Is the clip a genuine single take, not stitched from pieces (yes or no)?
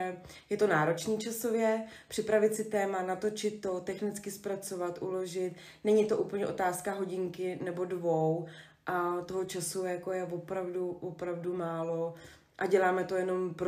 yes